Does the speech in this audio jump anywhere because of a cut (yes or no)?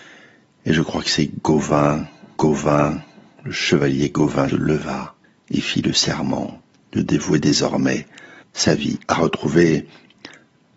yes